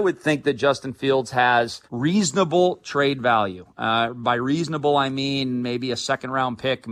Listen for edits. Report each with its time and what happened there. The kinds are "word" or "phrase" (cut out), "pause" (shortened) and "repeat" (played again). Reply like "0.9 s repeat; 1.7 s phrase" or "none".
1.9 s pause

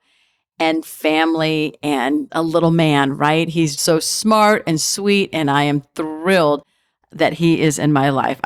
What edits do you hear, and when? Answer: 2.3 s word; 3.8 s word

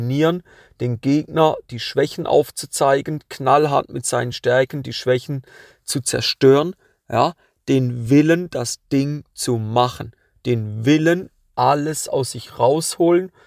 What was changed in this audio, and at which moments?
none

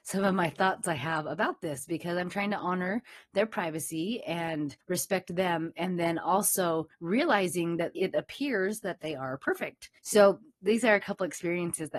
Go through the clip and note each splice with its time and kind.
4.8 s pause; 6.9 s pause; 7.9 s word; 10.0 s pause

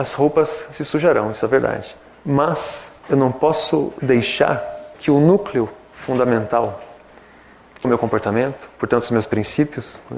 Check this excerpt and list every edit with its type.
3.0 s pause; 4.9 s word; 7.8 s word

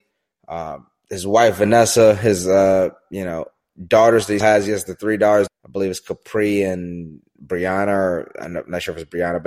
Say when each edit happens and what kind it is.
4.4 s word; 5.5 s word

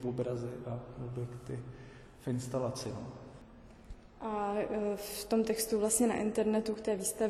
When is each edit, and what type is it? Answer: none

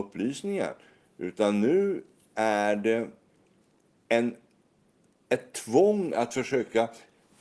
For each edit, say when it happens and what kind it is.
none

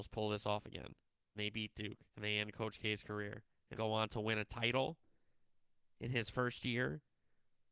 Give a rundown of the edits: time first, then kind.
1.3 s word; 2.1 s pause; 3.7 s phrase

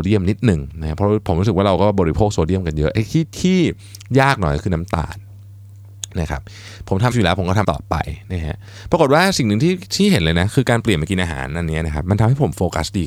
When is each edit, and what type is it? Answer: 7.1 s word; 7.6 s word

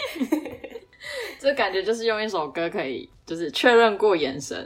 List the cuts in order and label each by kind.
none

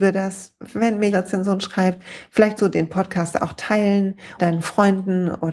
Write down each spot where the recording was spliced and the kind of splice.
1.1 s word; 2.6 s word; 4.4 s word

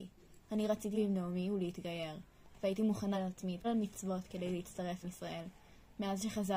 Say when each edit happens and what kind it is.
0.9 s word; 3.1 s word; 3.6 s word; 5.0 s word

